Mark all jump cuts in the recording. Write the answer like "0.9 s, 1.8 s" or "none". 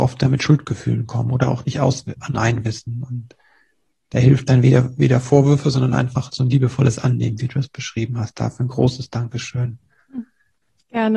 none